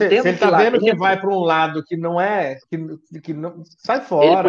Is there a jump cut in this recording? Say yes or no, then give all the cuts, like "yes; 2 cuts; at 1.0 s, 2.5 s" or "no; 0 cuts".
yes; 1 cut; at 2.6 s